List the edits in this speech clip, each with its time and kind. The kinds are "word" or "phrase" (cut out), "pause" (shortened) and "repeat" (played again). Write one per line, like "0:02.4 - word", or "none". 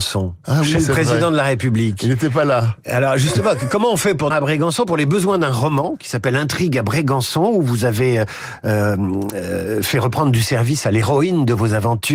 0:04.3 - word